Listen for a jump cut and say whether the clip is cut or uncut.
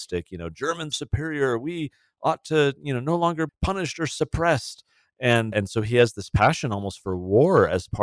cut